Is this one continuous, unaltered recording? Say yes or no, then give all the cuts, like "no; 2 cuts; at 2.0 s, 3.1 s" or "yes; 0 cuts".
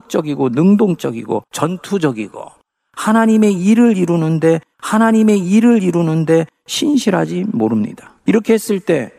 no; 3 cuts; at 1.5 s, 4.7 s, 8.2 s